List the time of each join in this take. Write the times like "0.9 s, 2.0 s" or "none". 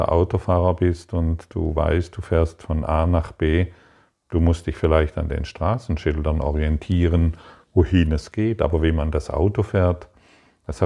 none